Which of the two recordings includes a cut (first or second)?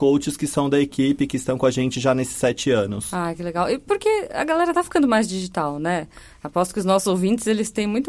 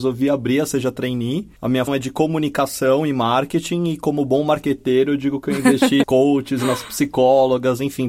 second